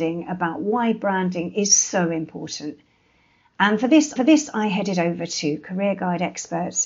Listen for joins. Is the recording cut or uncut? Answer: cut